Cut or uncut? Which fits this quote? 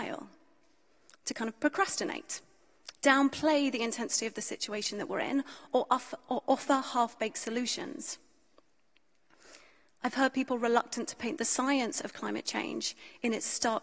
uncut